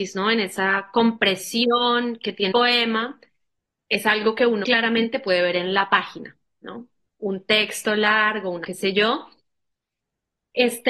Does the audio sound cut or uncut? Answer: cut